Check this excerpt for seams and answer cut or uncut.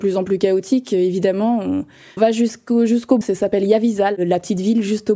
cut